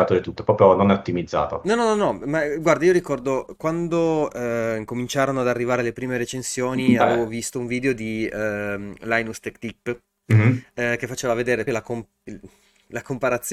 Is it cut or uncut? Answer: cut